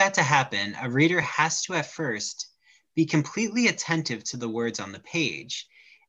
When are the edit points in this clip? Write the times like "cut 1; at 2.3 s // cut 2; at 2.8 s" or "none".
none

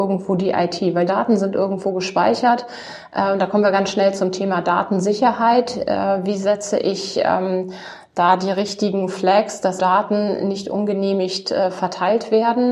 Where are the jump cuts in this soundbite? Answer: cut 1; at 1.1 s // cut 2; at 9.8 s

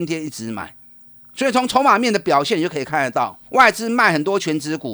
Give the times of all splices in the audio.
cut 1; at 3.4 s

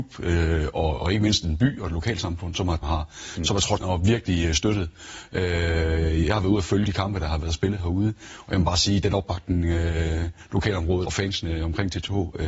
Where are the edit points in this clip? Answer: cut 1; at 2.8 s // cut 2; at 3.8 s // cut 3; at 6.8 s // cut 4; at 11.0 s

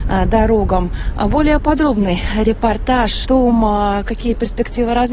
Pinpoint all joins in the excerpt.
cut 1; at 3.2 s

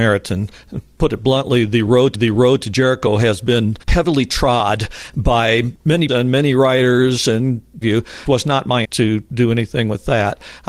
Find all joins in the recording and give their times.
cut 1; at 2.1 s // cut 2; at 3.8 s // cut 3; at 6.1 s // cut 4; at 7.8 s // cut 5; at 8.3 s // cut 6; at 8.8 s

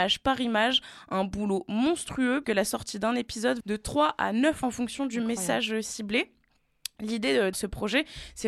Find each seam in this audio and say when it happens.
cut 1; at 2.4 s // cut 2; at 3.6 s // cut 3; at 4.6 s // cut 4; at 7.5 s

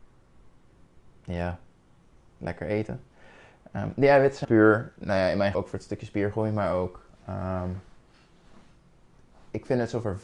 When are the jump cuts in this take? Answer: cut 1; at 2.2 s // cut 2; at 4.4 s // cut 3; at 5.5 s

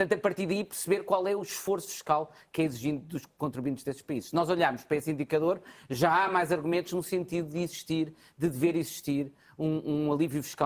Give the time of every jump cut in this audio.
none

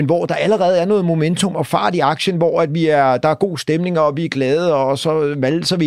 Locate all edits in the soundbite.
none

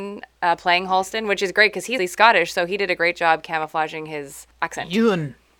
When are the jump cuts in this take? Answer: cut 1; at 2.0 s // cut 2; at 4.5 s

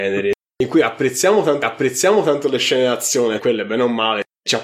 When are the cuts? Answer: cut 1; at 1.6 s // cut 2; at 3.4 s

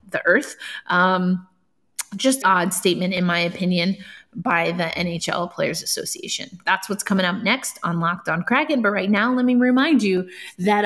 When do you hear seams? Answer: cut 1; at 2.4 s

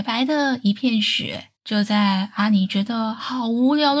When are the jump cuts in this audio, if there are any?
cut 1; at 1.6 s

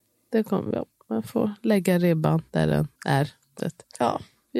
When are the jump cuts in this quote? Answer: cut 1; at 2.5 s // cut 2; at 2.9 s // cut 3; at 3.6 s

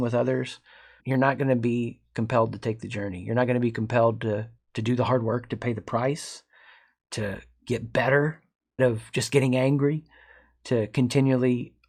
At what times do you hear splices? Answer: cut 1; at 1.0 s // cut 2; at 8.8 s

